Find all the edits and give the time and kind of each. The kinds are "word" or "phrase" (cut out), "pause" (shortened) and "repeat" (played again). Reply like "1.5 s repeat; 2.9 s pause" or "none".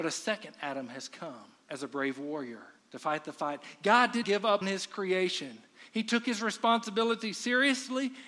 1.6 s pause; 2.8 s pause; 4.2 s word; 4.6 s word